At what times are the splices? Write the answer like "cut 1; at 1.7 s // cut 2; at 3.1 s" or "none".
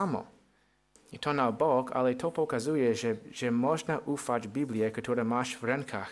none